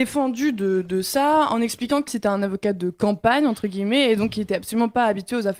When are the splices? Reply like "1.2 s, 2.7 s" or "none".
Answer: 2.1 s